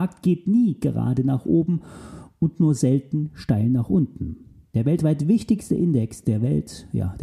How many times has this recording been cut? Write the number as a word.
zero